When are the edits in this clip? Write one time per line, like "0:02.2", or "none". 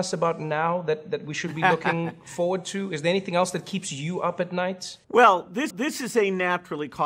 0:05.0
0:05.7

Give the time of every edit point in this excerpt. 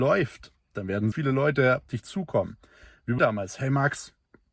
0:01.1
0:01.9
0:03.2

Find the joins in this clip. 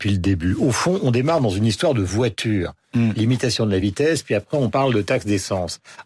none

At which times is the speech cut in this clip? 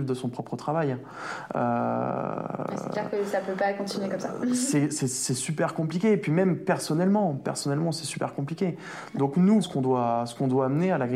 0:09.6

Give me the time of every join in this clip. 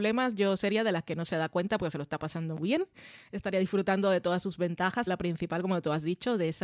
0:02.6
0:05.1

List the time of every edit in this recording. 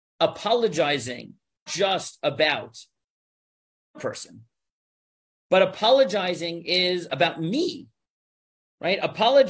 0:01.7
0:03.9

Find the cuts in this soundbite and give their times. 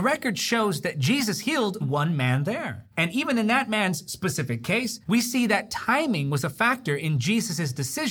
0:01.8
0:02.9
0:05.0

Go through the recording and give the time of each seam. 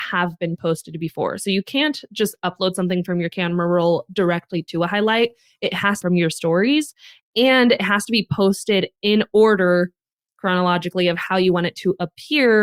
0:06.0

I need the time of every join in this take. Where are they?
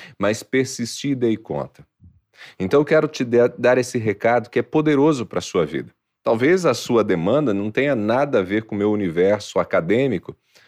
none

